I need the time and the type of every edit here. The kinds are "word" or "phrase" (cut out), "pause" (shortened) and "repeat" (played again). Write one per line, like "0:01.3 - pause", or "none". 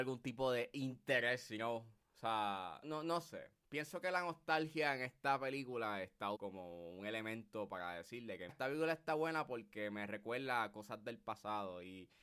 0:02.8 - word
0:06.3 - word
0:08.5 - word